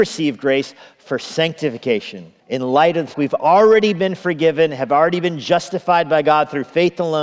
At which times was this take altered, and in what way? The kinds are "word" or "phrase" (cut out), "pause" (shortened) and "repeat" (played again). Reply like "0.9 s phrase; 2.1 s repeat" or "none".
2.4 s pause; 3.1 s word